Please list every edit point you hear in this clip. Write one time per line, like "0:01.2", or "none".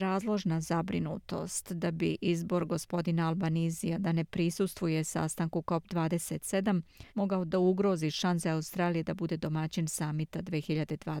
0:07.1